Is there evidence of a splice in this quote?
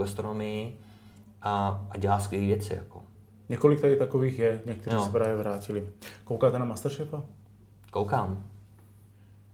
no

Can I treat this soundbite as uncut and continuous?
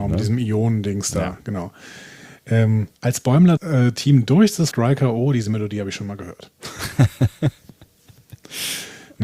no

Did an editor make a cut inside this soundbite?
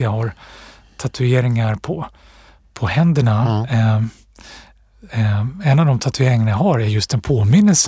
no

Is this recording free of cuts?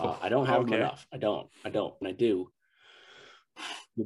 no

